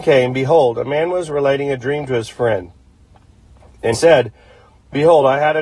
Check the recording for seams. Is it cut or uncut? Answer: cut